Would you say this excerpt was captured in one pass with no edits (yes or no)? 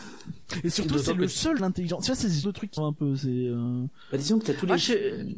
no